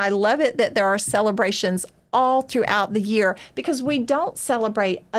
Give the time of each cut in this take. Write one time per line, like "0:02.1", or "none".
none